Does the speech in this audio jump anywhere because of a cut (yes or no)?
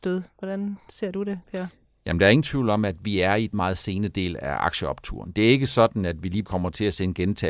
yes